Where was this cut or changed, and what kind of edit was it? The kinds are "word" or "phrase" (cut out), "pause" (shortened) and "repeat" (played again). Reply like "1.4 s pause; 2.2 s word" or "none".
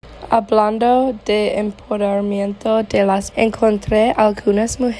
3.3 s word